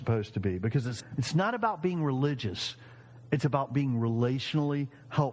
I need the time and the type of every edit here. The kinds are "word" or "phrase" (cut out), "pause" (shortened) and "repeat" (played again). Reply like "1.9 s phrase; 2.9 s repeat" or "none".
none